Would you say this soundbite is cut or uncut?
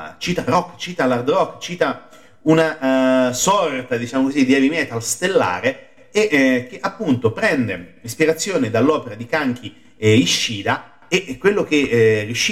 uncut